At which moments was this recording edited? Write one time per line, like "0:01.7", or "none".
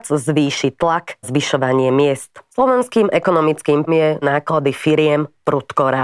0:01.2
0:02.5
0:03.9
0:04.2